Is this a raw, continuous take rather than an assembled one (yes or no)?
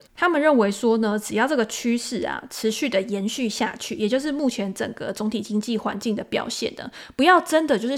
yes